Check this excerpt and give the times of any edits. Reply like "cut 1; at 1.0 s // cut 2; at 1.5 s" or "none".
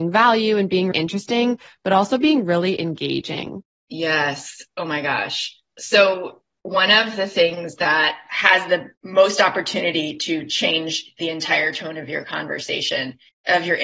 cut 1; at 0.9 s